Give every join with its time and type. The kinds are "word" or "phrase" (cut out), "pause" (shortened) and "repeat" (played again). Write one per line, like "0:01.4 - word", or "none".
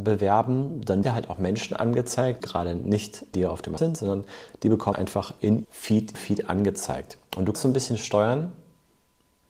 0:01.0 - word
0:02.4 - word
0:03.3 - word
0:03.8 - word
0:04.9 - word
0:05.6 - word
0:06.1 - word
0:07.5 - word